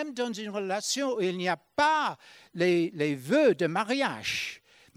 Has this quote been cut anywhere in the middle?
no; 0 cuts

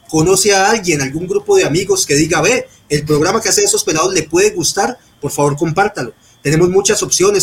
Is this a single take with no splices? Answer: yes; 0 cuts

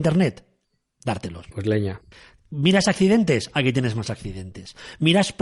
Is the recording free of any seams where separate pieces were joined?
yes; 0 cuts

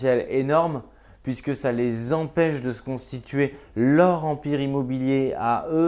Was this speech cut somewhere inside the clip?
no; 0 cuts

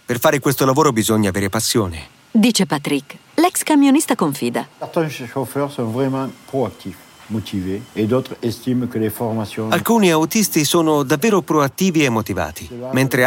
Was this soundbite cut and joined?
yes; 2 cuts; at 4.7 s, 7.9 s

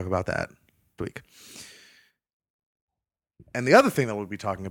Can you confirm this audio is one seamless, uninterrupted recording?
no; 1 cut; at 1.0 s

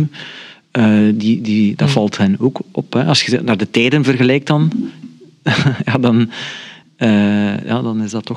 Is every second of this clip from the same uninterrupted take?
yes; 0 cuts

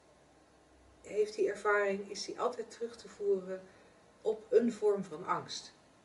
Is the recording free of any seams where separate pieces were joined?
yes; 0 cuts

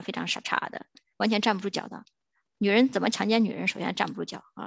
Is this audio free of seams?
yes; 0 cuts

